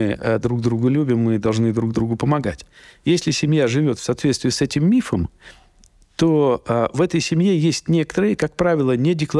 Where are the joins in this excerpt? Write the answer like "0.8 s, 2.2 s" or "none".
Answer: none